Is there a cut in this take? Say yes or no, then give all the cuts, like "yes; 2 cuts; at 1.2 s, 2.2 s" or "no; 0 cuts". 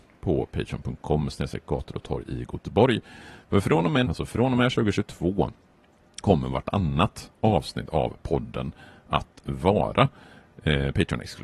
yes; 2 cuts; at 4.0 s, 6.2 s